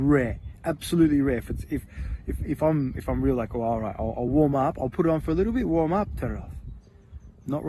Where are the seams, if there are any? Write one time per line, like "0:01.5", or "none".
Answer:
none